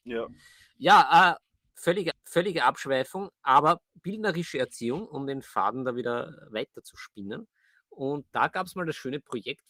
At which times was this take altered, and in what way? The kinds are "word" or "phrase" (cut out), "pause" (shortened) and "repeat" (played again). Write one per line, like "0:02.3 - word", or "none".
0:02.1 - repeat